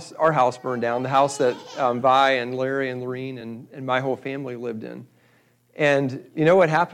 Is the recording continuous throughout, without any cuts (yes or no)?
yes